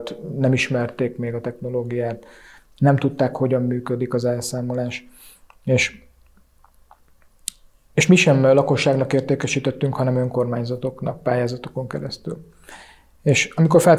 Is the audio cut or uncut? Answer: uncut